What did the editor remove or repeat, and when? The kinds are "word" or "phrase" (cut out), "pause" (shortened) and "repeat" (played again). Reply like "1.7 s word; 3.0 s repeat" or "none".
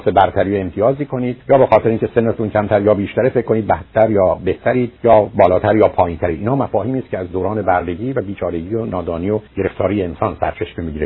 1.4 s pause; 5.0 s pause; 9.5 s pause